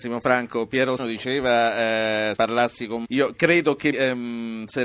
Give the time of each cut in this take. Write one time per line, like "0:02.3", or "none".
0:01.0
0:02.4
0:03.0
0:03.9